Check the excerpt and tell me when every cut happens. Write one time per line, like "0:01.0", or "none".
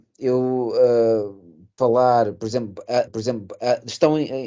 0:01.8
0:03.1

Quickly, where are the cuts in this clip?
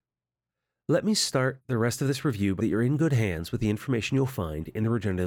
0:02.6

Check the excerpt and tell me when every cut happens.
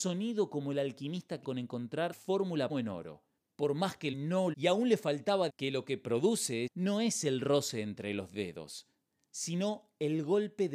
0:01.4
0:02.1
0:02.7
0:03.4
0:04.1
0:04.5
0:05.5
0:06.7

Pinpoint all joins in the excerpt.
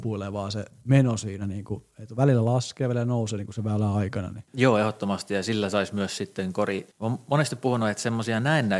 0:04.5
0:06.9

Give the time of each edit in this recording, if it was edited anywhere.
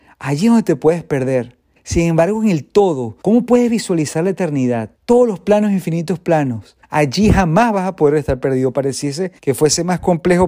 0:01.8
0:03.2
0:04.9
0:06.8
0:09.4

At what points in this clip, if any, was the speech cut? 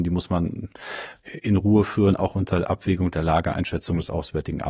none

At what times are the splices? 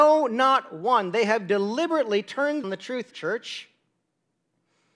0:02.6
0:03.1

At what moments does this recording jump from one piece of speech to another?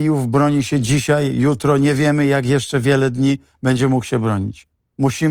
none

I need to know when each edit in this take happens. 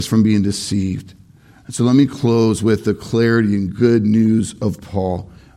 none

